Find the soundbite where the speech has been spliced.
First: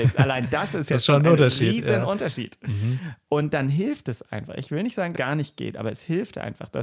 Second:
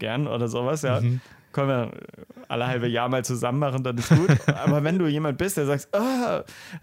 first; 1 cut; at 5.2 s

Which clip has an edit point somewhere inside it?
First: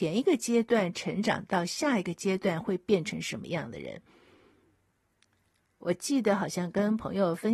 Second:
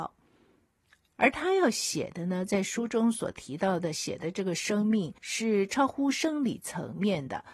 second; 1 cut; at 5.2 s

